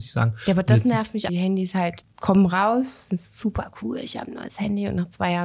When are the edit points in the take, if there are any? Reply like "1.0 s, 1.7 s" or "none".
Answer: 1.3 s, 2.0 s